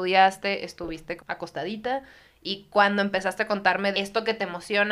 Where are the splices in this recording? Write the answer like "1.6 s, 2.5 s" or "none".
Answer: 1.2 s, 3.9 s